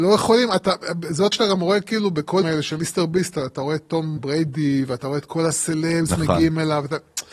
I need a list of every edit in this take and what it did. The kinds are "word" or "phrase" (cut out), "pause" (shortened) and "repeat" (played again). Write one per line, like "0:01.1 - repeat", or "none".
0:01.3 - word
0:02.4 - word
0:04.2 - word